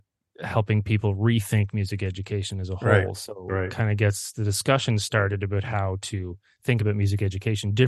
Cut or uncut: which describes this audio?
uncut